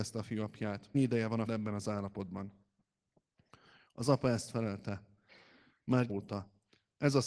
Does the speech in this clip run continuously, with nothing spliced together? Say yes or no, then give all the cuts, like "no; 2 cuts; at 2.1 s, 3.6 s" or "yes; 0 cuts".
no; 3 cuts; at 0.9 s, 1.5 s, 6.1 s